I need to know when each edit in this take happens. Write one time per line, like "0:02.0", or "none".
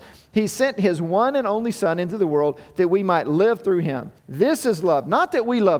0:04.2